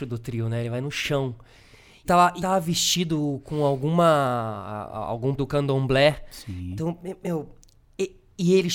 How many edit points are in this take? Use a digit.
3